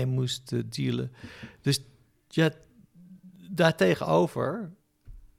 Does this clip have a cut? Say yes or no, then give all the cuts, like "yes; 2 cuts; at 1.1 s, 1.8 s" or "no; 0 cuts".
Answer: no; 0 cuts